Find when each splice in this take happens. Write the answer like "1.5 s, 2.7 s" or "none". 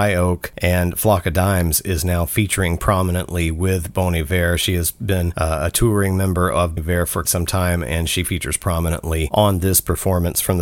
6.8 s, 7.2 s